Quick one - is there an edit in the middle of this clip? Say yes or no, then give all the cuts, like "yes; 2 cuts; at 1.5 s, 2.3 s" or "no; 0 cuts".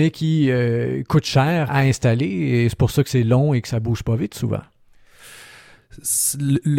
yes; 1 cut; at 1.7 s